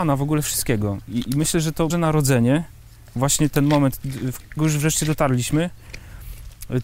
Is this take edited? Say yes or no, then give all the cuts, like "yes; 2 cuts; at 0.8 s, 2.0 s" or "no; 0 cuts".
yes; 4 cuts; at 1.3 s, 1.9 s, 3.5 s, 4.6 s